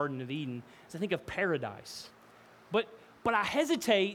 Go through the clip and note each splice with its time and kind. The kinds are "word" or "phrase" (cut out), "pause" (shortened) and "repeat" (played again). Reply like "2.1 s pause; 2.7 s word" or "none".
none